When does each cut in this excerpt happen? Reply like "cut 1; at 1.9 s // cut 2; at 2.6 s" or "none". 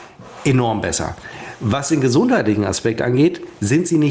none